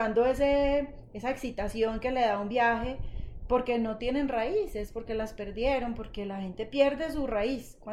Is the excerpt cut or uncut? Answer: uncut